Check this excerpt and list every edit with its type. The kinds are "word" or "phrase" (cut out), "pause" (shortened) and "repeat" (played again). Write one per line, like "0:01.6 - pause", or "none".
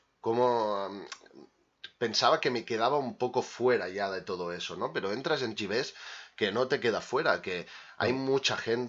0:05.6 - word